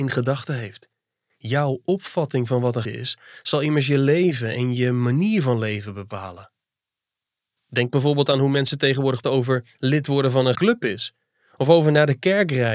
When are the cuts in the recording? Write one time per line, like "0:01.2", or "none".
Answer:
0:02.8
0:09.2
0:10.5